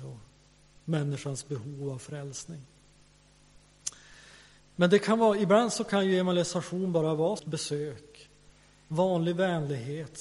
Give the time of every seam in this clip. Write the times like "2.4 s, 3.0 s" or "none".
4.6 s, 7.4 s